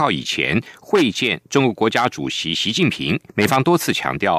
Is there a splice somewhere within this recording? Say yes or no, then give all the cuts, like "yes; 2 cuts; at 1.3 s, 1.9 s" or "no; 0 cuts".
yes; 1 cut; at 3.3 s